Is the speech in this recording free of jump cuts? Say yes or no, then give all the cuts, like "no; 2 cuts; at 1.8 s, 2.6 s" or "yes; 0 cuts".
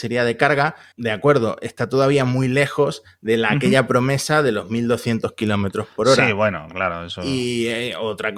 yes; 0 cuts